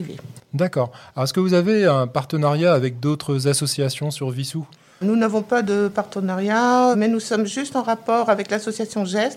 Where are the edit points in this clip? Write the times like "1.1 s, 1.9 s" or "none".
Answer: 5.0 s, 6.9 s